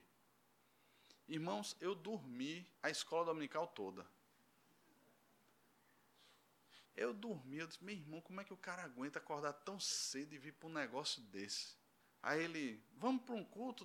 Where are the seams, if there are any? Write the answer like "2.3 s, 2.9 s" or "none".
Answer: 2.8 s, 6.8 s, 12.0 s